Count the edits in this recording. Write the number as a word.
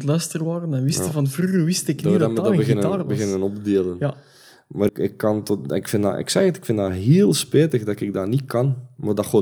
one